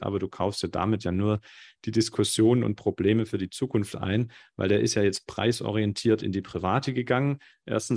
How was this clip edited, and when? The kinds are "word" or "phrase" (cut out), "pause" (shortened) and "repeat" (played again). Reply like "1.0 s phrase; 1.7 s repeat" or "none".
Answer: none